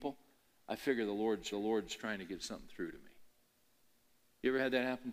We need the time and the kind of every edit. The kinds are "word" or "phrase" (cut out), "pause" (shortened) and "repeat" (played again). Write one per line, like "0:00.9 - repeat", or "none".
0:01.5 - repeat